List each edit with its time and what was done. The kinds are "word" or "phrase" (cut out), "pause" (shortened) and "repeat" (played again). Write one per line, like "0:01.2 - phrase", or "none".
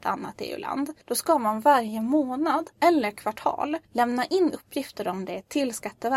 0:01.0 - pause
0:02.7 - pause
0:03.8 - pause